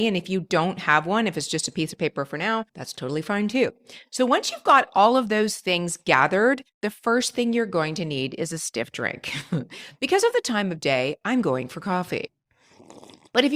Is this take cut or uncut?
cut